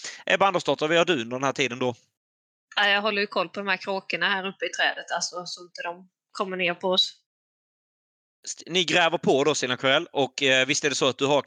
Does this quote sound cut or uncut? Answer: uncut